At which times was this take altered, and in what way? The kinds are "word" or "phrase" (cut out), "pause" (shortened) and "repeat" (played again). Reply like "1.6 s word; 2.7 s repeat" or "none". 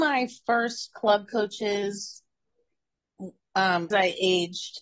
3.9 s word